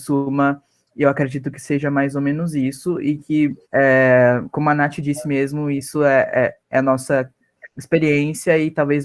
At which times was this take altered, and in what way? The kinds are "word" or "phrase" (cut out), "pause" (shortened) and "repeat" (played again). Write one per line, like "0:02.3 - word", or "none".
0:03.6 - pause
0:06.6 - pause
0:07.7 - pause